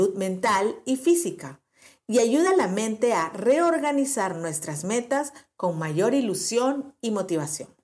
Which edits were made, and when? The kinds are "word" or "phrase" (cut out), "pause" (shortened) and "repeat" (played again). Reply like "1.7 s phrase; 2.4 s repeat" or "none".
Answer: none